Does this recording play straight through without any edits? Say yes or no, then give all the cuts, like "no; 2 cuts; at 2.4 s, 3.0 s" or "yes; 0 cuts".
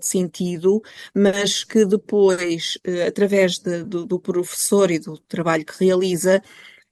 yes; 0 cuts